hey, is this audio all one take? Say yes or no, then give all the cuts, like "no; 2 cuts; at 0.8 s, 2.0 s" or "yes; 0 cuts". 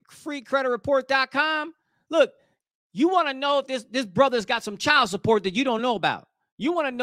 yes; 0 cuts